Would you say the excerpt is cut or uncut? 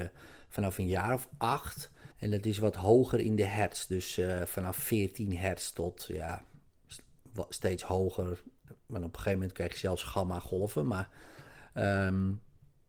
cut